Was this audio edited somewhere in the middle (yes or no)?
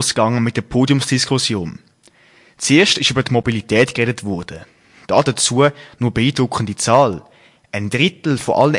no